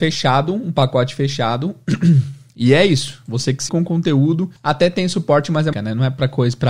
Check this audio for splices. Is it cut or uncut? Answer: cut